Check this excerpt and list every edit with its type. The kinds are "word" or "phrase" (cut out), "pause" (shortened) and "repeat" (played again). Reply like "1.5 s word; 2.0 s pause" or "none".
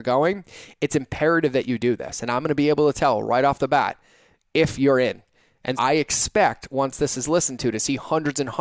5.8 s word